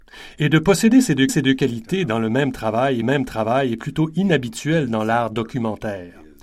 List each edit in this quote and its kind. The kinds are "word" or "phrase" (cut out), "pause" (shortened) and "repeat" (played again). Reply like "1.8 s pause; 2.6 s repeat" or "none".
1.3 s repeat; 3.0 s repeat

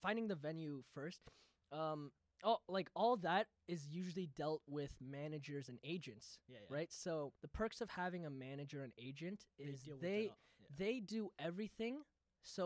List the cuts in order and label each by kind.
2.2 s pause; 7.4 s pause

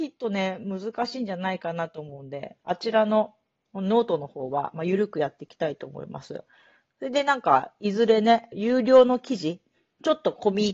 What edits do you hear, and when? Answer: none

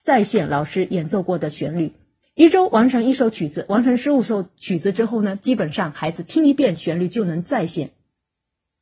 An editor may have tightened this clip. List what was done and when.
2.2 s pause

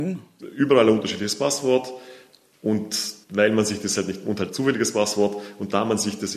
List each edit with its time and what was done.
3.2 s pause; 4.5 s word

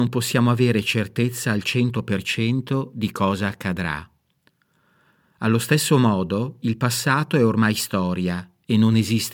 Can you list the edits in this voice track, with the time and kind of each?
none

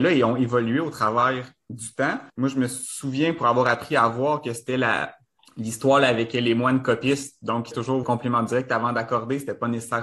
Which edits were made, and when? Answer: 2.3 s pause; 5.4 s pause; 7.7 s phrase; 8.0 s phrase

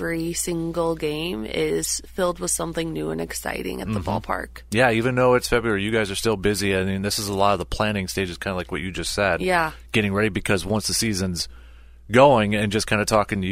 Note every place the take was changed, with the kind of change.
none

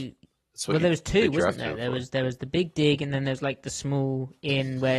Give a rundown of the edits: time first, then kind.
none

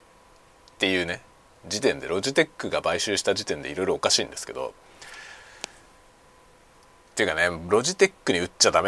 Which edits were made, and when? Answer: 1.3 s pause

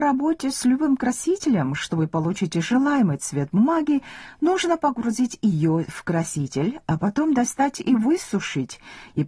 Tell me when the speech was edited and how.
none

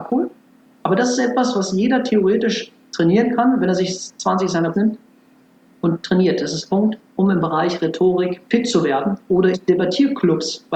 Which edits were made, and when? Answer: 4.7 s word; 6.7 s word; 7.1 s pause; 8.5 s pause; 9.5 s word

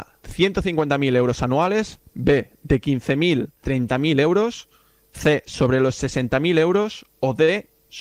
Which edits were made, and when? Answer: 3.6 s word

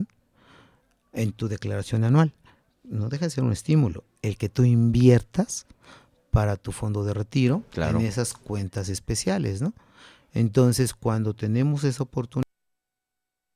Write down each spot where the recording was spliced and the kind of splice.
none

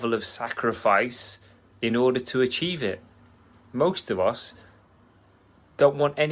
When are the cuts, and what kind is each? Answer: none

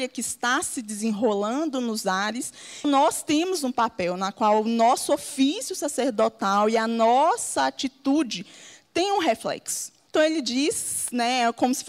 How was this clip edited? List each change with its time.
2.8 s phrase; 10.1 s pause

